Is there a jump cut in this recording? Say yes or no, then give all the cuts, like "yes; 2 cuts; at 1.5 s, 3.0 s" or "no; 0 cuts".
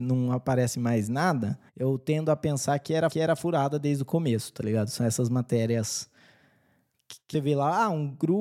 yes; 3 cuts; at 1.7 s, 3.1 s, 7.3 s